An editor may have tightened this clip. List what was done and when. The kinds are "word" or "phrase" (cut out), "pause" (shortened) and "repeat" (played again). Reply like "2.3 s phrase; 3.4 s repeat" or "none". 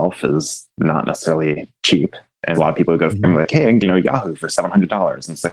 1.8 s pause; 2.5 s word; 3.1 s word; 3.8 s phrase